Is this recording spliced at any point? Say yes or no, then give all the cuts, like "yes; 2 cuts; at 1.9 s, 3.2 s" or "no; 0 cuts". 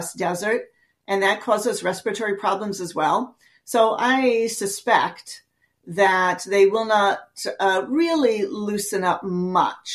no; 0 cuts